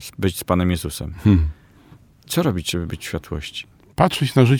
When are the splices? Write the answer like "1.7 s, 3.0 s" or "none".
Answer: none